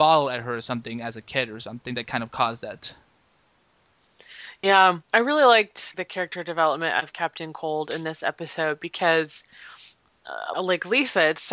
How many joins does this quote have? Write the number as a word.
three